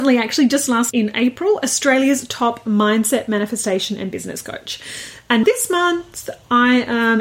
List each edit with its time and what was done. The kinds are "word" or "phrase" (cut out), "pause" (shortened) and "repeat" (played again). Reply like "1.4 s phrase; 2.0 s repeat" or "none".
0.9 s word; 5.4 s word